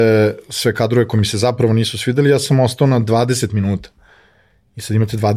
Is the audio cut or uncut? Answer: uncut